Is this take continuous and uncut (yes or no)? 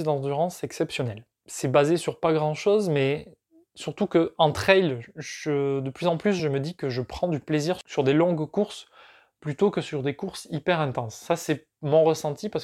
yes